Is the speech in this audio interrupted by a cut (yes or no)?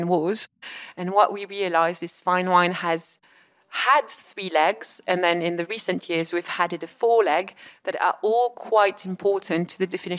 no